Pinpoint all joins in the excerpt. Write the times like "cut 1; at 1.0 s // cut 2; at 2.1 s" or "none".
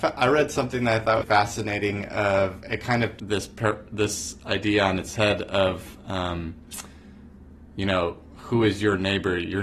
cut 1; at 1.2 s // cut 2; at 3.2 s

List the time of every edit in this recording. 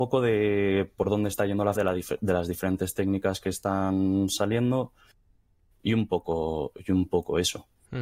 cut 1; at 1.8 s

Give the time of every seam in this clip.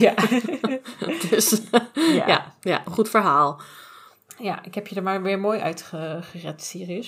none

